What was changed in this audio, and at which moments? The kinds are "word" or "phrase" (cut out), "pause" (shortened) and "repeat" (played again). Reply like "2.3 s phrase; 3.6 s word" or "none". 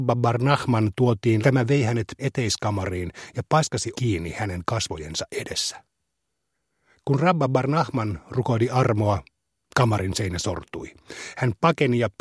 1.4 s phrase; 2.2 s word; 3.9 s word